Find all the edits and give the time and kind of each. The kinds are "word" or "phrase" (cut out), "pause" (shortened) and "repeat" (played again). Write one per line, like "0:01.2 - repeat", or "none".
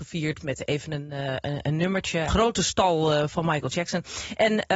0:02.3 - phrase